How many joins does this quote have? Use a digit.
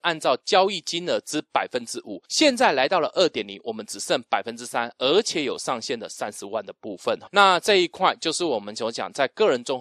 2